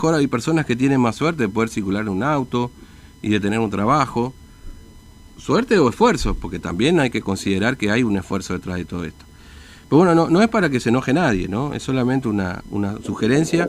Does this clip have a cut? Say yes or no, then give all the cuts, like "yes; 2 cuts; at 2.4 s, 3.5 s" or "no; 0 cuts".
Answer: no; 0 cuts